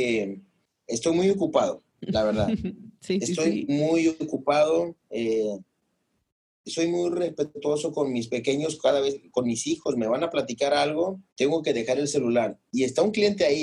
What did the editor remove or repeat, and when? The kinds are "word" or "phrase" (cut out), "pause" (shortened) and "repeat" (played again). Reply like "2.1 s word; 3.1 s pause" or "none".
1.9 s pause; 5.0 s pause; 11.3 s pause